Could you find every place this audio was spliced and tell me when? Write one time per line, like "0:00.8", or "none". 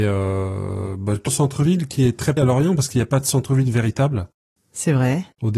0:01.3
0:02.4